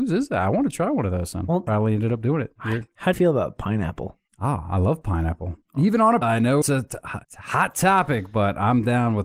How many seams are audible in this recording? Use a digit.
7